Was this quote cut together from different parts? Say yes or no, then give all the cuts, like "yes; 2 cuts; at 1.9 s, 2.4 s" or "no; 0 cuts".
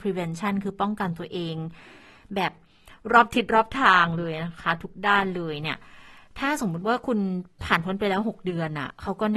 no; 0 cuts